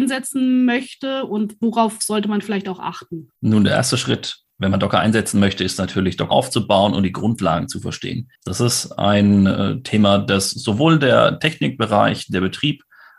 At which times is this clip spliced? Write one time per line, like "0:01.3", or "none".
0:03.3
0:06.3
0:08.4